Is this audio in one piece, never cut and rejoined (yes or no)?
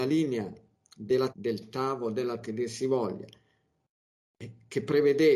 no